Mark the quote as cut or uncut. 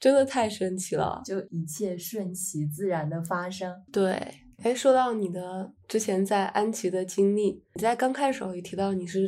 cut